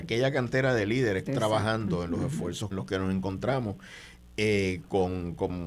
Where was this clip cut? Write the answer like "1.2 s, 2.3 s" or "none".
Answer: 1.3 s, 2.7 s